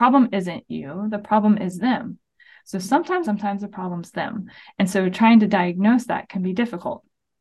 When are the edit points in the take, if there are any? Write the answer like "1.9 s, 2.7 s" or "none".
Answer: 3.2 s